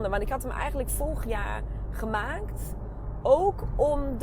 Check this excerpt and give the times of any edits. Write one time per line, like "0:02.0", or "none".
none